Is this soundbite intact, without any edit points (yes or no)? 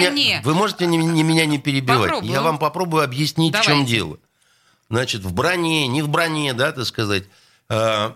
yes